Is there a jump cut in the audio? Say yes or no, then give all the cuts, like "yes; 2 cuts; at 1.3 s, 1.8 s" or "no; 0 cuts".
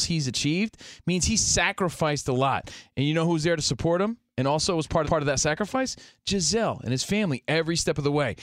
yes; 1 cut; at 5.0 s